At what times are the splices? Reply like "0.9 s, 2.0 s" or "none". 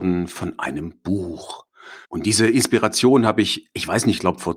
2.0 s

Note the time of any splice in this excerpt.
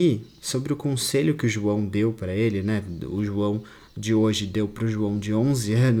none

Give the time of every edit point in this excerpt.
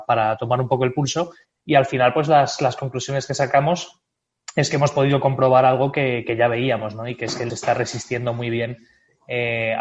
1.4 s, 7.5 s

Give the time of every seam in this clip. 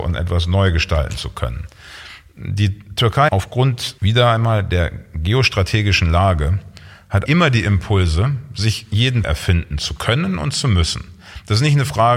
3.3 s, 4.0 s, 7.3 s, 9.2 s

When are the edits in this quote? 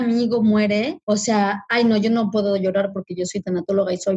1.0 s

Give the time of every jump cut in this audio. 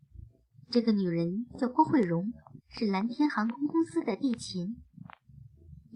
2.6 s

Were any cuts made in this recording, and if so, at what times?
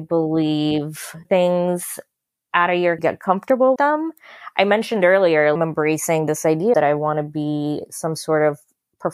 1.2 s, 3.0 s, 3.8 s, 5.6 s, 6.7 s

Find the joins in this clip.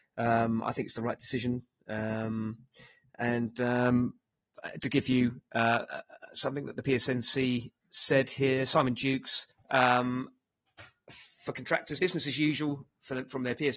4.8 s, 7.8 s, 9.5 s, 12.0 s

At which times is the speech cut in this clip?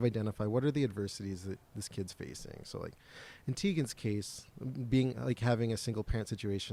none

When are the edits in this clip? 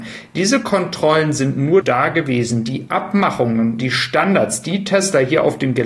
1.8 s, 3.8 s

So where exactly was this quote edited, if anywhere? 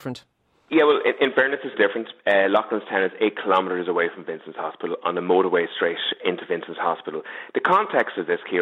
1.7 s, 6.2 s

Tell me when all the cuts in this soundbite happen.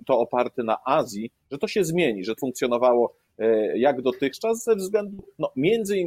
2.4 s

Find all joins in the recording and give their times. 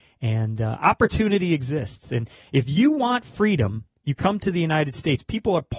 none

